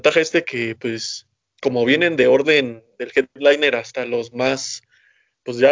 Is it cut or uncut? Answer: uncut